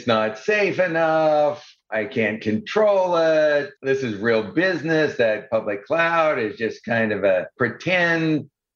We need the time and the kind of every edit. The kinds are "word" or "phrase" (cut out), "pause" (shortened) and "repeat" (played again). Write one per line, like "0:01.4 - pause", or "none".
0:01.8 - pause
0:03.8 - pause